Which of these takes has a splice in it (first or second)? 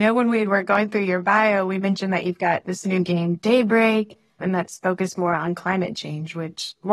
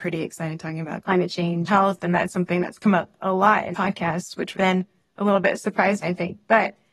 second